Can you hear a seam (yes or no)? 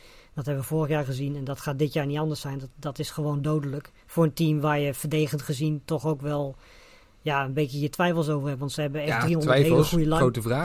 yes